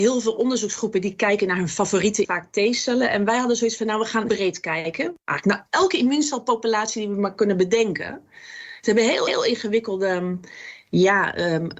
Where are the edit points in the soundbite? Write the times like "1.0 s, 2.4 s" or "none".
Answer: 2.2 s, 4.3 s, 9.3 s